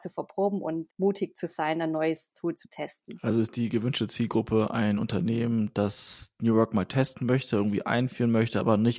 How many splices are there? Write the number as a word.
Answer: one